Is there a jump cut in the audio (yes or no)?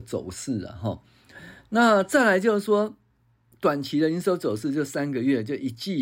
no